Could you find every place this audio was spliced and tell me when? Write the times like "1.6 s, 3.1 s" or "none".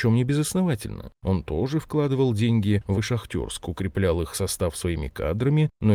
2.9 s